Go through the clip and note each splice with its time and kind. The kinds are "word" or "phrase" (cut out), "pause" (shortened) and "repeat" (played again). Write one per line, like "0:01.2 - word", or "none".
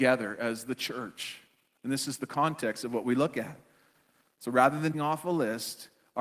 0:04.9 - word